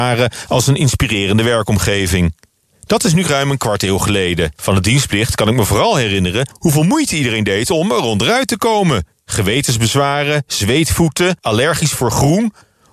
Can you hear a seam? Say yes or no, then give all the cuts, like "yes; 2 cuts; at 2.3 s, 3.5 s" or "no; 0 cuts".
no; 0 cuts